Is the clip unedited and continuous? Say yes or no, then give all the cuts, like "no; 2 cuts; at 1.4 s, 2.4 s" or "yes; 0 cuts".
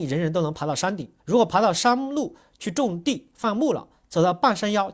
no; 1 cut; at 1.2 s